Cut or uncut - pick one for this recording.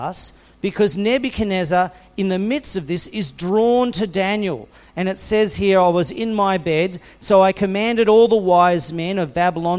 uncut